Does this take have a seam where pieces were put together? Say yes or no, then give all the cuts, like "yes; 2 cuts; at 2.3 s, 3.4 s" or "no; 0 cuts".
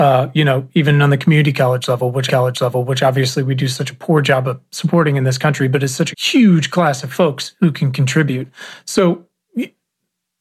yes; 2 cuts; at 2.3 s, 6.1 s